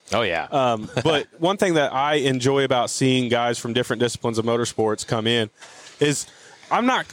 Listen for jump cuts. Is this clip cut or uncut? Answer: uncut